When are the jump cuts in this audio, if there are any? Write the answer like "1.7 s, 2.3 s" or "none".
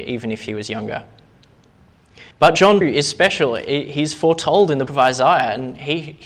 2.3 s, 2.8 s, 4.9 s

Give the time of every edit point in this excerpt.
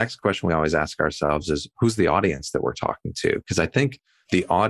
none

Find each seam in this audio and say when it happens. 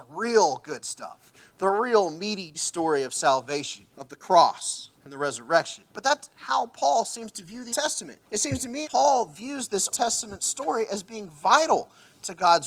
2.5 s, 3.9 s, 4.9 s, 5.9 s, 6.3 s, 7.7 s, 8.2 s, 8.8 s, 9.9 s

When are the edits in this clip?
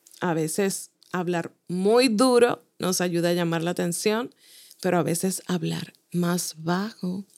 none

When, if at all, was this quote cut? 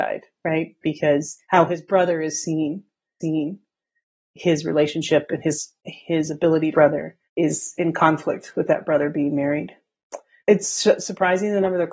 1.4 s, 3.2 s, 6.7 s, 7.2 s, 10.4 s

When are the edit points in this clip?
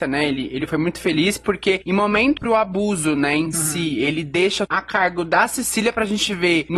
2.4 s, 4.7 s

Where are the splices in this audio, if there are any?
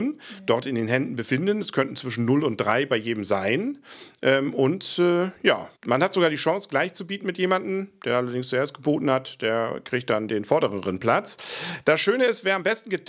5.8 s

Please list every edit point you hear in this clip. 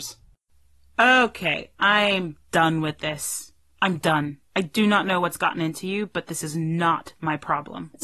3.6 s, 4.5 s

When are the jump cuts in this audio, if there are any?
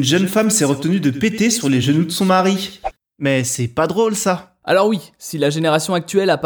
none

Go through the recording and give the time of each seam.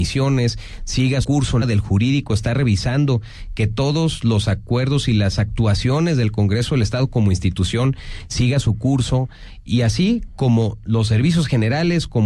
1.2 s, 1.6 s

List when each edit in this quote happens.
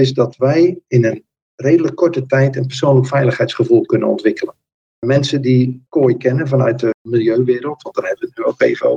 none

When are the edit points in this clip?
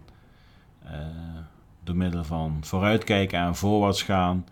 1.6 s

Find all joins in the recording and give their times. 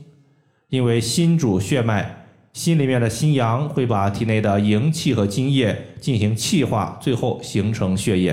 none

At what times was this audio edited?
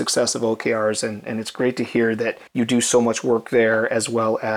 2.5 s

